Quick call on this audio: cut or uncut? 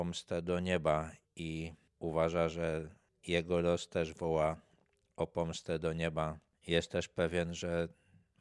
uncut